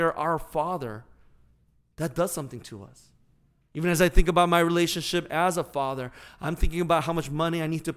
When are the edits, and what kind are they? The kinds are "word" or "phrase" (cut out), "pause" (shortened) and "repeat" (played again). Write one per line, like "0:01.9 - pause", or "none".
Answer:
none